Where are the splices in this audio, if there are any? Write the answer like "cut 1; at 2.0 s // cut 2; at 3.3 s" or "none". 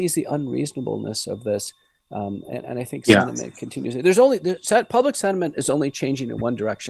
none